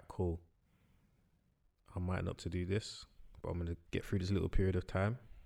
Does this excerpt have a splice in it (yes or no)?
yes